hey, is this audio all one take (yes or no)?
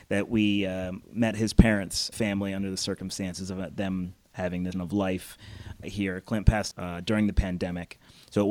no